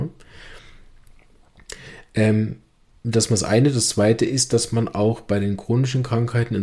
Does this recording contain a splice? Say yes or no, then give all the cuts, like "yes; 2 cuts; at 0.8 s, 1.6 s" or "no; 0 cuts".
no; 0 cuts